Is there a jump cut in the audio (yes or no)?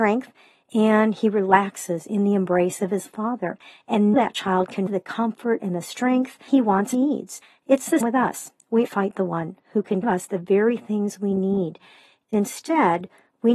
yes